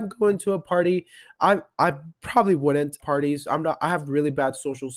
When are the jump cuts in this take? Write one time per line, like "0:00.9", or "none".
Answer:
0:03.0